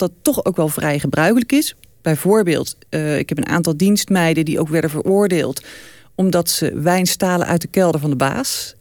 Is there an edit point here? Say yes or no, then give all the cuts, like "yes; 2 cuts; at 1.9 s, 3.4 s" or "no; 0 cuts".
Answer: no; 0 cuts